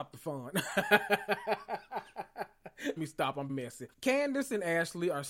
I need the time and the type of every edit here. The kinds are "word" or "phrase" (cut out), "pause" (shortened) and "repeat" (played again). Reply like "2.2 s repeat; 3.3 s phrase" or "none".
3.0 s word; 3.5 s word; 3.9 s pause